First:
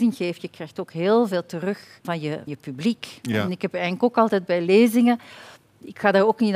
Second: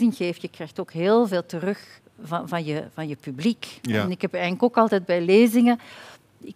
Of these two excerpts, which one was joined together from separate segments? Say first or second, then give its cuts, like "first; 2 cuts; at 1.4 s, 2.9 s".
first; 2 cuts; at 2.0 s, 2.5 s